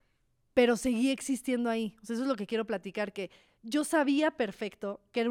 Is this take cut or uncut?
uncut